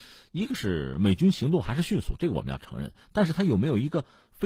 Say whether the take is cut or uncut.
uncut